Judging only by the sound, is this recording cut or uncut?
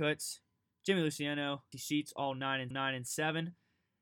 cut